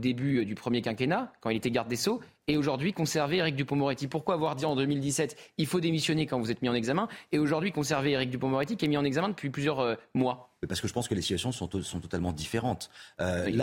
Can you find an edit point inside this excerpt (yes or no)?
yes